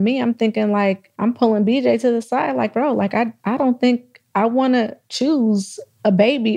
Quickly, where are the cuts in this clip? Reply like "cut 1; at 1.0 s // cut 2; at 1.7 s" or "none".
cut 1; at 1.1 s // cut 2; at 3.4 s // cut 3; at 5.0 s